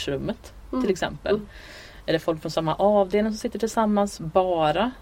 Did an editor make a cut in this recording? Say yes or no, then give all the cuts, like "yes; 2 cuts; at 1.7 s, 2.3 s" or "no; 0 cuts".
no; 0 cuts